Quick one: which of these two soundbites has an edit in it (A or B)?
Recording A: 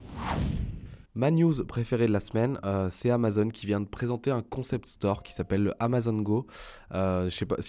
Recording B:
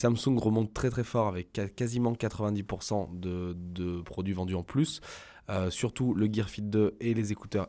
A